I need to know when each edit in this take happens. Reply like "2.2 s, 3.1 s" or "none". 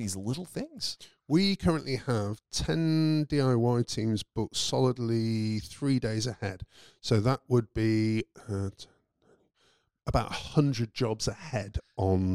none